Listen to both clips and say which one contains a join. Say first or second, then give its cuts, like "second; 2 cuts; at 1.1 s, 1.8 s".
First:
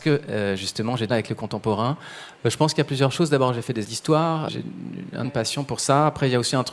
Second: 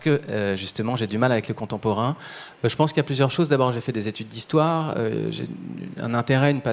first; 4 cuts; at 1.1 s, 3.8 s, 4.5 s, 5.2 s